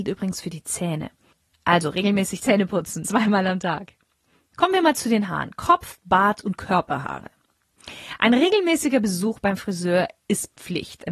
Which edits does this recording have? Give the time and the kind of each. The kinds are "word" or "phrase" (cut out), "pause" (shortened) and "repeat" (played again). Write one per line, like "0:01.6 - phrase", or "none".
0:03.0 - word